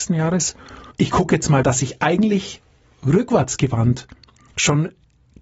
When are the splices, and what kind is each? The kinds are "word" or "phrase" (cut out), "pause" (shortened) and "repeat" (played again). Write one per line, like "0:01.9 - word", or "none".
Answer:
0:00.9 - word
0:01.6 - phrase